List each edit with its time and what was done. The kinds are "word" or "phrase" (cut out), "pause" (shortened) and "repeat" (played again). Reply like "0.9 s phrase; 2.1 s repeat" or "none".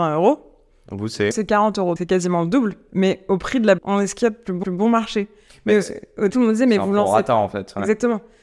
1.3 s word; 2.0 s word; 3.8 s word; 4.6 s repeat; 6.3 s word